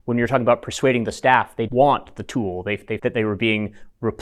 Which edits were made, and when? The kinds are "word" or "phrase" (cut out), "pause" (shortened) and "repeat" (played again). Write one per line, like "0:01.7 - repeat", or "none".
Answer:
0:01.7 - word
0:03.0 - word